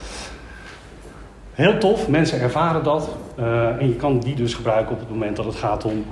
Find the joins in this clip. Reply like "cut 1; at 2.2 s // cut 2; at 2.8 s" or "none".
none